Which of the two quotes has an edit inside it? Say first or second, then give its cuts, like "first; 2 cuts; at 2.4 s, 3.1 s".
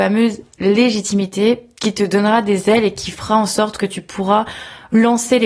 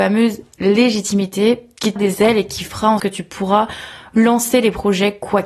second; 2 cuts; at 2.0 s, 3.0 s